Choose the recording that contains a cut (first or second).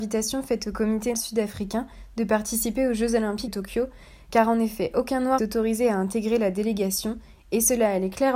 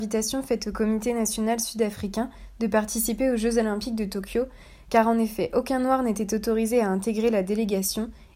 first